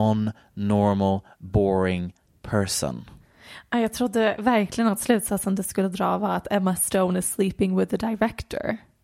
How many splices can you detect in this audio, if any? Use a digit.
0